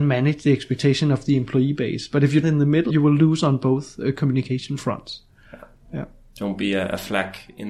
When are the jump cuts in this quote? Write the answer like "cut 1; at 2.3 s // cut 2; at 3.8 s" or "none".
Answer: cut 1; at 2.4 s // cut 2; at 2.9 s